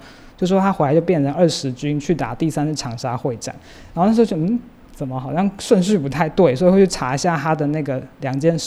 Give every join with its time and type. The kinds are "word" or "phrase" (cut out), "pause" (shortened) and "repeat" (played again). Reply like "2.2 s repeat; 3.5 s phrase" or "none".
none